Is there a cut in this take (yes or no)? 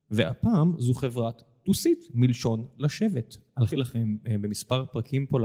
yes